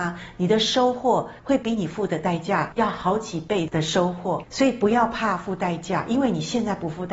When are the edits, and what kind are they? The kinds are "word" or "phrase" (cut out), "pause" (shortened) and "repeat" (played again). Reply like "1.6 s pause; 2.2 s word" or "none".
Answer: 1.4 s pause